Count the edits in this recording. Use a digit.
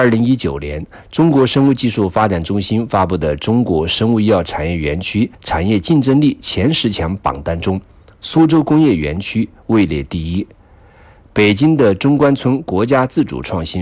1